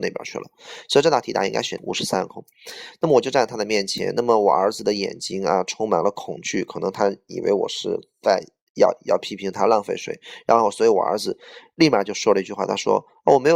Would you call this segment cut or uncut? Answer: cut